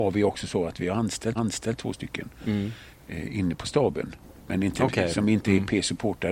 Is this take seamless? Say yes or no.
no